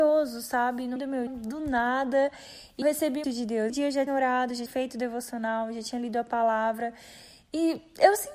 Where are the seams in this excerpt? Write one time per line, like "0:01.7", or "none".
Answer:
0:01.0
0:01.3
0:02.8
0:03.2
0:03.7
0:04.1
0:04.7